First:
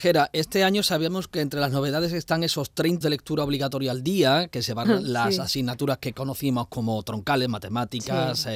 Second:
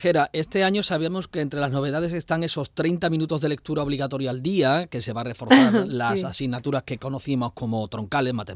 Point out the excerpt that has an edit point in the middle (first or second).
first